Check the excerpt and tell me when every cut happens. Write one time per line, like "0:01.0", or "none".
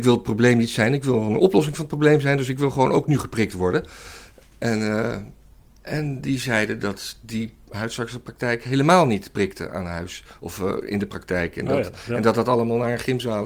none